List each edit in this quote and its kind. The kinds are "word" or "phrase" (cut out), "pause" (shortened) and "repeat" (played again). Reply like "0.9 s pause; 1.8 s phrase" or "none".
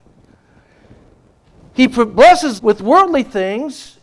2.6 s word